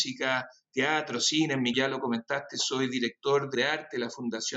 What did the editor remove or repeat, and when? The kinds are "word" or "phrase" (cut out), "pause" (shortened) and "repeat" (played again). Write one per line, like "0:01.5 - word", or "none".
0:01.7 - word
0:03.5 - phrase